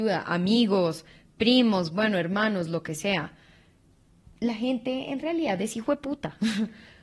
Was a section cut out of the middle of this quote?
no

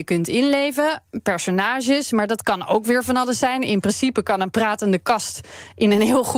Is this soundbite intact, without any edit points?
yes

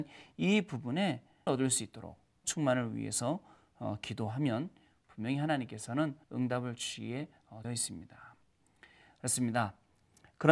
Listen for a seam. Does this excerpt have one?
yes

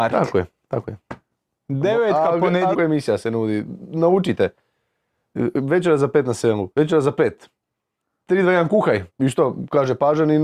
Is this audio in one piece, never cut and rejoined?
no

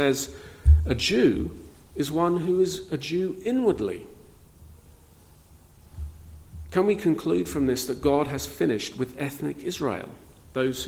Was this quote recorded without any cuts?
yes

